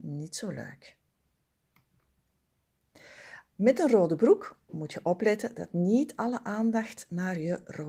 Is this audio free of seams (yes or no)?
yes